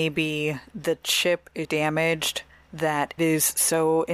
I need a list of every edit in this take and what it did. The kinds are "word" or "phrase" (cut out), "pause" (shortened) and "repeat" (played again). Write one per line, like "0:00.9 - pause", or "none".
0:01.6 - word
0:03.2 - word